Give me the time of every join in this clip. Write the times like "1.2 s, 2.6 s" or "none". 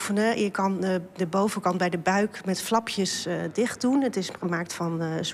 none